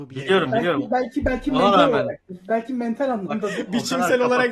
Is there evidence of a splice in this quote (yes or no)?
no